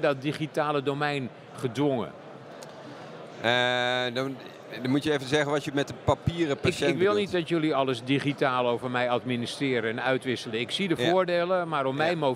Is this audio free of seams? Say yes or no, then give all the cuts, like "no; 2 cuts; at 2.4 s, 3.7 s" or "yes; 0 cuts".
yes; 0 cuts